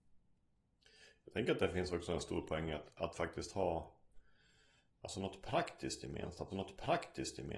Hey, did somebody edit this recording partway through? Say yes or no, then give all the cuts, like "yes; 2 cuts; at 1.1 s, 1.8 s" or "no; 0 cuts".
yes; 1 cut; at 6.5 s